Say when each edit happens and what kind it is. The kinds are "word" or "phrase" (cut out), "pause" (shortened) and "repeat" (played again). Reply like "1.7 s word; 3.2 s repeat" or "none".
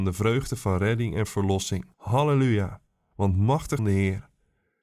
1.9 s pause; 3.8 s phrase